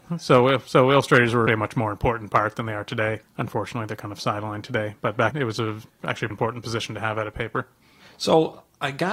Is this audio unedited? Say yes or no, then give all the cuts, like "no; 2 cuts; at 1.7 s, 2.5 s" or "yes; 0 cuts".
no; 4 cuts; at 1.5 s, 3.2 s, 5.3 s, 6.3 s